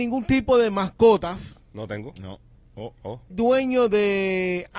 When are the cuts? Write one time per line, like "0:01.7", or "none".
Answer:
0:03.3